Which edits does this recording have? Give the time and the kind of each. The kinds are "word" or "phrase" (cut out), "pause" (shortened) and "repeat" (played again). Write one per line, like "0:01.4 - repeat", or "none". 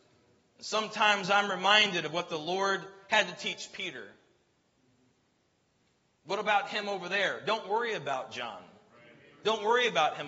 none